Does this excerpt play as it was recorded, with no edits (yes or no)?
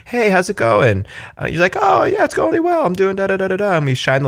no